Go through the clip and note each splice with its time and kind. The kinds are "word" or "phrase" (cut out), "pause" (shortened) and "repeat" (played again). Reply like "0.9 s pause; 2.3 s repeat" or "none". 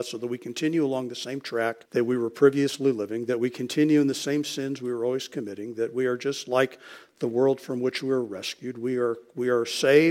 1.9 s pause